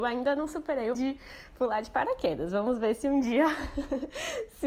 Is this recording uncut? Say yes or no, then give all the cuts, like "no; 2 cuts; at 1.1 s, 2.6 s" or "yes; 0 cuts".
no; 1 cut; at 0.9 s